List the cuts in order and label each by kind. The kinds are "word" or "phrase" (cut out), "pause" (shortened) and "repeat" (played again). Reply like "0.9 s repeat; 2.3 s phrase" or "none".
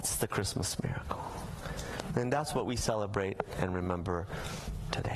none